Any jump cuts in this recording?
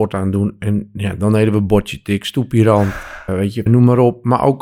yes; 2 cuts; at 3.3 s, 3.7 s

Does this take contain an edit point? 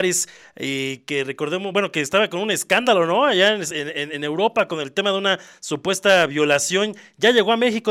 no; 0 cuts

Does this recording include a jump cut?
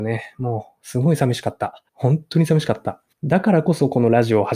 yes; 2 cuts; at 1.9 s, 3.1 s

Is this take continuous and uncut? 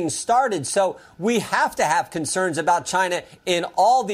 yes; 0 cuts

